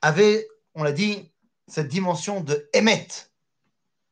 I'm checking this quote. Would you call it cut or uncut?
uncut